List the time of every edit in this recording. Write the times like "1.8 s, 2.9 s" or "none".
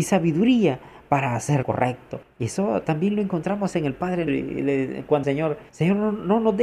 1.6 s, 2.2 s, 4.3 s, 5.2 s, 5.7 s

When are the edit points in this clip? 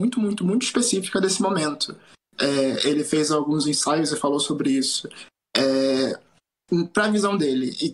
none

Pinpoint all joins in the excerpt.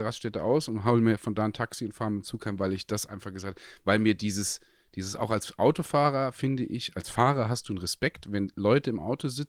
none

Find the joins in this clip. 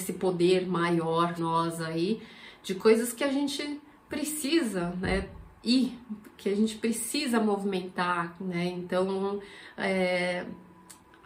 1.4 s

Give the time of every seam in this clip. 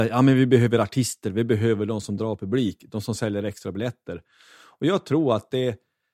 none

